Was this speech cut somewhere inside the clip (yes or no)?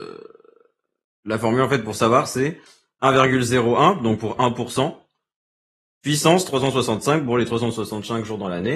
no